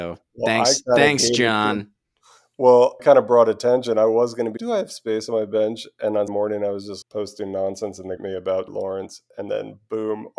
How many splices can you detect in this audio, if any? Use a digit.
6